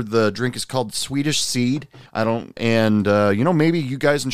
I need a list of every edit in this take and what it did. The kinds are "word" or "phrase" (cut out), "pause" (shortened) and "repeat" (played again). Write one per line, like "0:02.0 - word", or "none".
0:02.1 - pause
0:02.6 - word